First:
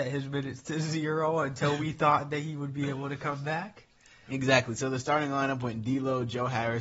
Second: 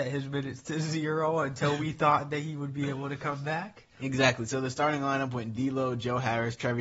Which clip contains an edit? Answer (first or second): second